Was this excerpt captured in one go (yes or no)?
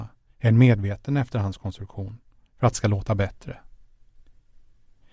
no